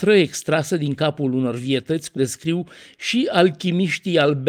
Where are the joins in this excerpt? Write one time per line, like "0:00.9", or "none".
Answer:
0:02.2